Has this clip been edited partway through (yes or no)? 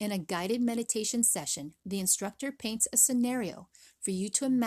no